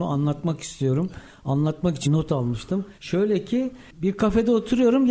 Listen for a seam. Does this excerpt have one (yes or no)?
yes